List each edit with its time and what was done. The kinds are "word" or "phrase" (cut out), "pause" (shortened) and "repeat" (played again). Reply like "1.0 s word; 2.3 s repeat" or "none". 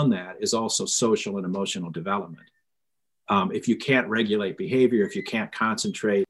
none